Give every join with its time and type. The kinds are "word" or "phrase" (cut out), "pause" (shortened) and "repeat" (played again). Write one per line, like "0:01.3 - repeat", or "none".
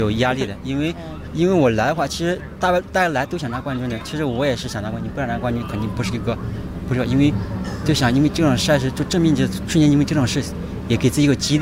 none